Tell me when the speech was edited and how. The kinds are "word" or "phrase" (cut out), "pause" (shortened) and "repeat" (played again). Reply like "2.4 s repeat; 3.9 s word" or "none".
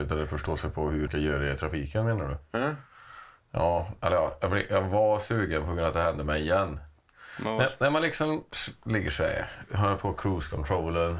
1.1 s word